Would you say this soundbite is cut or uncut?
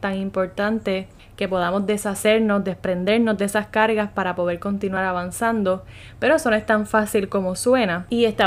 uncut